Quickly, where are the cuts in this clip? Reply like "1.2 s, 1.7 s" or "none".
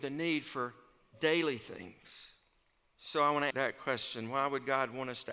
3.5 s